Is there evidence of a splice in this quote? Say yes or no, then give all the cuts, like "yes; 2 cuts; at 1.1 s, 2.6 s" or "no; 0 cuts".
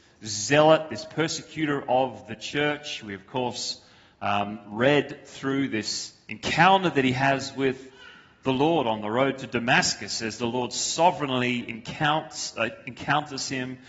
no; 0 cuts